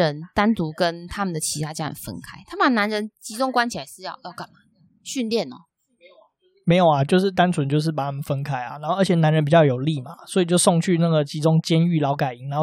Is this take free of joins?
yes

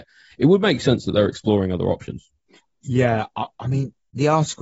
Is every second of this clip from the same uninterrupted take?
yes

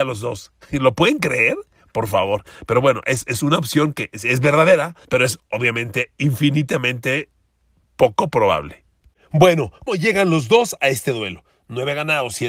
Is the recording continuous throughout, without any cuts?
no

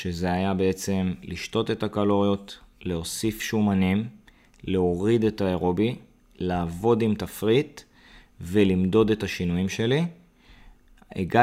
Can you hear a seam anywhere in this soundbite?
no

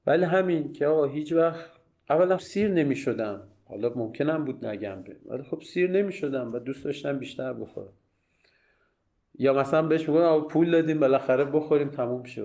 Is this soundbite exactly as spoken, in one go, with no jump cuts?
no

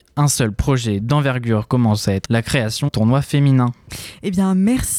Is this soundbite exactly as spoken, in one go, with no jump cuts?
no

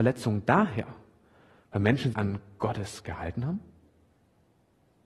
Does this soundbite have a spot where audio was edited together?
yes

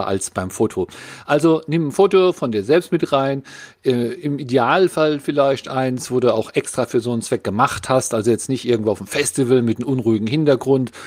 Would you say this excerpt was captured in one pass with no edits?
yes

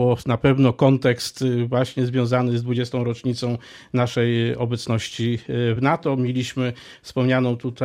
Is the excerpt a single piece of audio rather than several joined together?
yes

